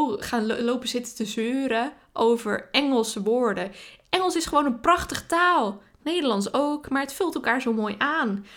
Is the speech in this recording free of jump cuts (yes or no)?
yes